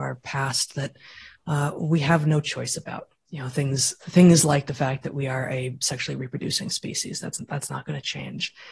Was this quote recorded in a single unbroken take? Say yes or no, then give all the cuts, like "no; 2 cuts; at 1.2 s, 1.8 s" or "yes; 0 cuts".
yes; 0 cuts